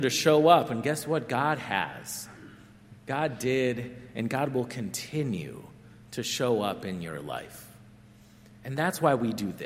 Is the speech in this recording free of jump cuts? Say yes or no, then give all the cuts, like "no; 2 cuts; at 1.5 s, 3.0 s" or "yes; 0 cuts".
yes; 0 cuts